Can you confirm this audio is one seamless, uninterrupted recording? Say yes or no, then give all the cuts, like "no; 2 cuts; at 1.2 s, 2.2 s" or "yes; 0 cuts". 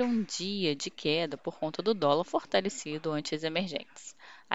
yes; 0 cuts